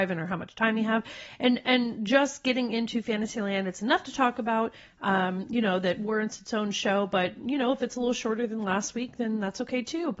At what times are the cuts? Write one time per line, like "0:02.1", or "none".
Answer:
none

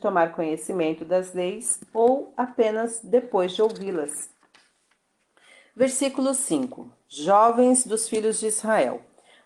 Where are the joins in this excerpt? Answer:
none

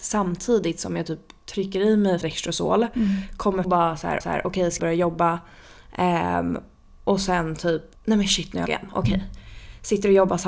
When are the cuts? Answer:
0:02.2
0:03.6
0:04.2
0:04.8
0:07.9
0:08.7

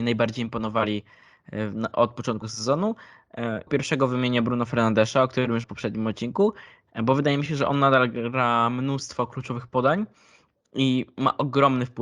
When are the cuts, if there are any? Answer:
0:02.4
0:03.7
0:05.6

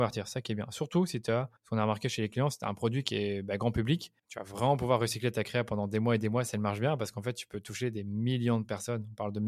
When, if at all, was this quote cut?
0:01.6
0:04.2

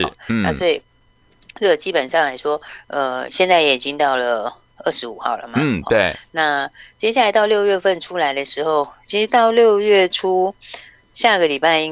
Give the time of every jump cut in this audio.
none

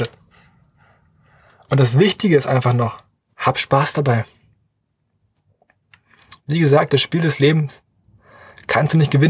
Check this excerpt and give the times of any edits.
none

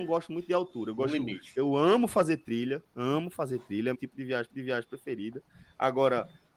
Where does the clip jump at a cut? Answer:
0:03.9
0:04.5

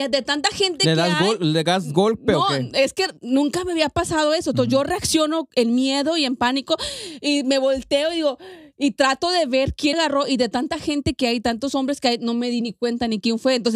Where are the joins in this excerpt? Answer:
0:03.2
0:09.9

